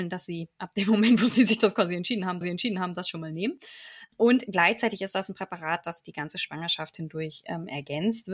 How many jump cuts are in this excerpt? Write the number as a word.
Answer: one